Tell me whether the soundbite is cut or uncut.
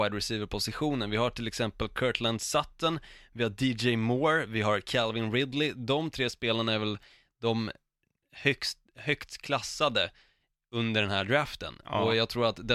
uncut